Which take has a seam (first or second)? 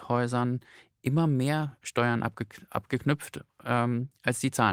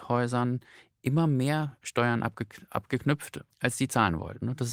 second